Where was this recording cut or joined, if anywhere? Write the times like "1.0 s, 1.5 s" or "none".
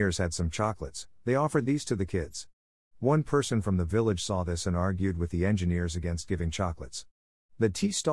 none